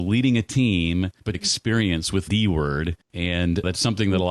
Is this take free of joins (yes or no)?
no